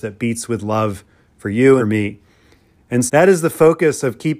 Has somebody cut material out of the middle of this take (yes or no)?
yes